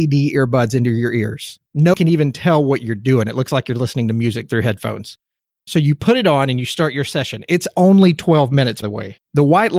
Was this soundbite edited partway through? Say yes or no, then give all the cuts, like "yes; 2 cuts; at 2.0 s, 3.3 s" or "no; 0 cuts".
yes; 2 cuts; at 1.9 s, 8.8 s